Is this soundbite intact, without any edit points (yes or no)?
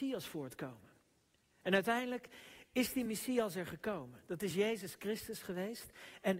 yes